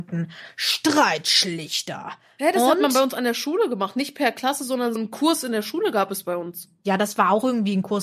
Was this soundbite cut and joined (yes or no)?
yes